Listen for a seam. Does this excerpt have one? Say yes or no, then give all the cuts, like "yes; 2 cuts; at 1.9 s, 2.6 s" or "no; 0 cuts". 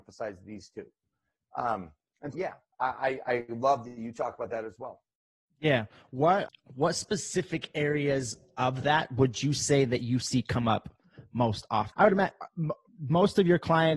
yes; 3 cuts; at 2.3 s, 6.5 s, 11.9 s